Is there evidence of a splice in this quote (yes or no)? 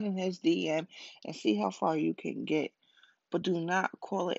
no